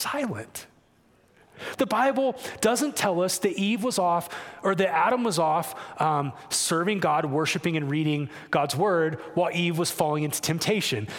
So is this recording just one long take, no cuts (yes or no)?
yes